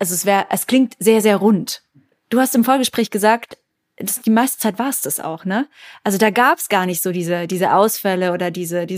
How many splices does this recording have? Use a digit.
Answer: 0